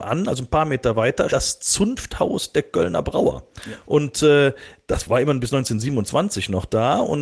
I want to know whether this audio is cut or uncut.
cut